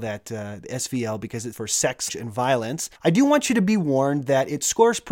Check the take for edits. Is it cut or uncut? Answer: cut